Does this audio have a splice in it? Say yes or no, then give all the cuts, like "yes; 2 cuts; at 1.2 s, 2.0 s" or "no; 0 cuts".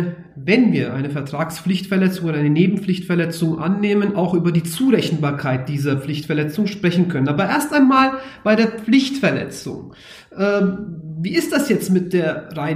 no; 0 cuts